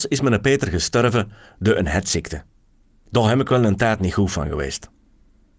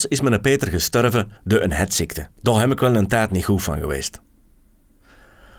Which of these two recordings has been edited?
second; 2 cuts; at 1.4 s, 2.3 s

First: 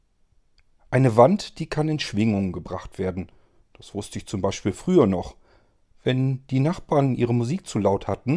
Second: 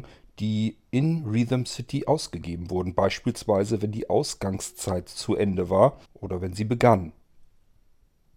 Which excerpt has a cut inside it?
second; 1 cut; at 6.0 s

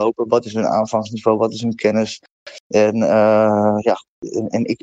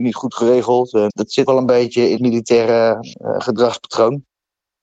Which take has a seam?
second; 4 cuts; at 1.1 s, 1.5 s, 2.2 s, 3.1 s

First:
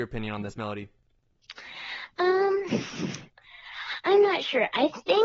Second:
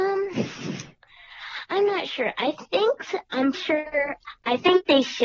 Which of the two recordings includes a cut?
second; 1 cut; at 3.5 s

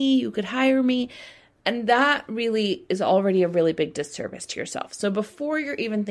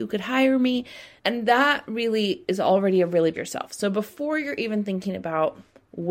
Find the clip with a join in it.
second; 2 cuts; at 1.2 s, 3.3 s

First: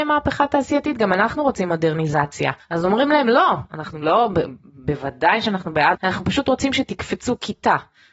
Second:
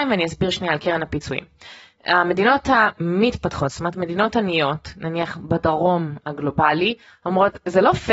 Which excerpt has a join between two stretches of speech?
first; 2 cuts; at 2.6 s, 5.9 s

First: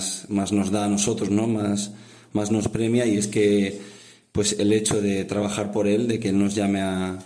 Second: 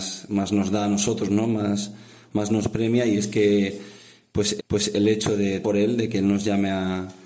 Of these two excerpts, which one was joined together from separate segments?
second; 2 cuts; at 4.6 s, 5.6 s

